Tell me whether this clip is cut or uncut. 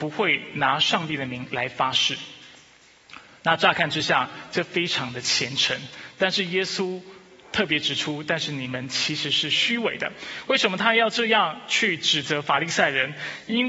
uncut